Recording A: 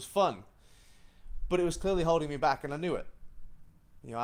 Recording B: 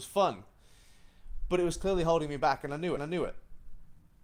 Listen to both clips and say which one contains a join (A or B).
B